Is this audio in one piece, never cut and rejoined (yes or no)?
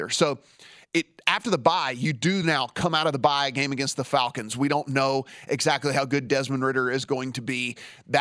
yes